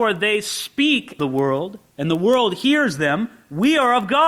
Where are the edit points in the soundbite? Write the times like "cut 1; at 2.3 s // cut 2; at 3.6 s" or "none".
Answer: cut 1; at 1.2 s // cut 2; at 1.9 s